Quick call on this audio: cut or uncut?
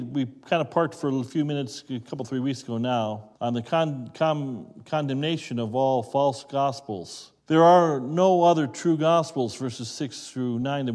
cut